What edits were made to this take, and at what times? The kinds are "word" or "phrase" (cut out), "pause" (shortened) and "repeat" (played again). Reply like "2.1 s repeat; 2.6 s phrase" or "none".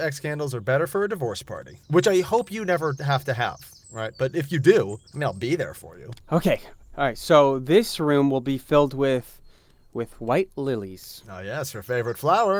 1.8 s pause; 5.1 s pause

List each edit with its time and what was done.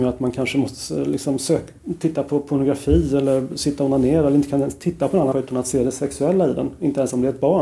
5.3 s word

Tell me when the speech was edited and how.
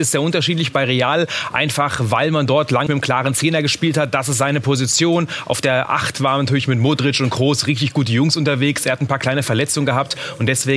2.9 s word

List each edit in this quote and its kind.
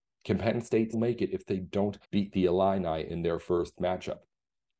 0.9 s word; 2.0 s pause

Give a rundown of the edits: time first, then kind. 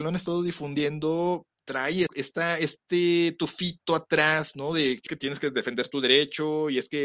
2.1 s word; 5.1 s word

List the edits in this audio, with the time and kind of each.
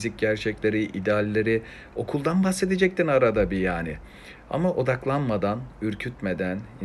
none

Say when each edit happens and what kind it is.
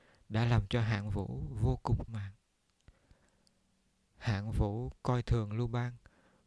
2.1 s word

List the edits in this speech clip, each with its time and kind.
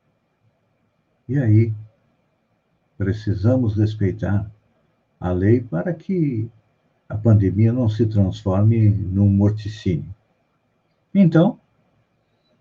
none

